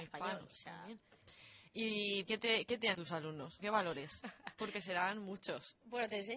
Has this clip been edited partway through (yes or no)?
yes